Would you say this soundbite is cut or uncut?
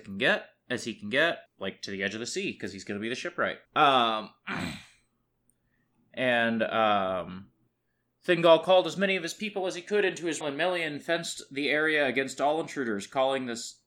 cut